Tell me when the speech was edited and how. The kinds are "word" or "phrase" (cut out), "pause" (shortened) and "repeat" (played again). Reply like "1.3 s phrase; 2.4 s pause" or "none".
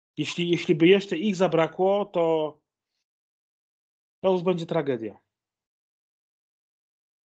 none

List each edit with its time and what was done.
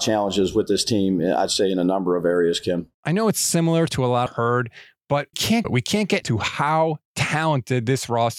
2.9 s pause; 4.3 s phrase; 5.3 s word; 5.6 s phrase; 6.2 s word

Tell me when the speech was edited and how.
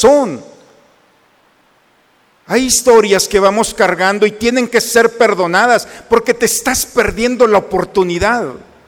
none

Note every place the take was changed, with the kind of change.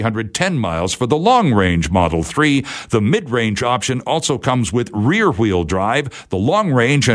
none

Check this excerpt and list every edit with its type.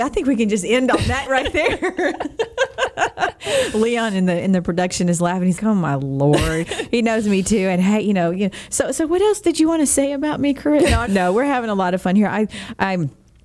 1.3 s word; 5.6 s word; 6.6 s word; 11.1 s word

